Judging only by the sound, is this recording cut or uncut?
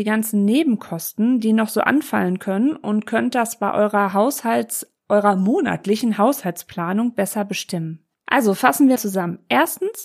cut